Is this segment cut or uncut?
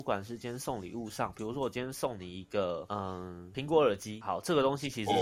uncut